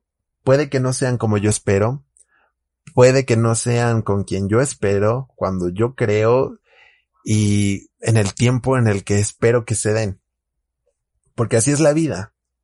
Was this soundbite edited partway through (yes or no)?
no